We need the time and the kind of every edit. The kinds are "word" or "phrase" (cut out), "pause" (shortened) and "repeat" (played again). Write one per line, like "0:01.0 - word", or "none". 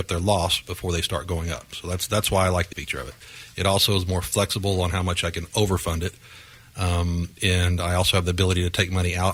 0:02.7 - word